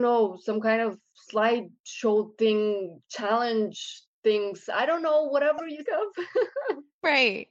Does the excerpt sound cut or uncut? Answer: cut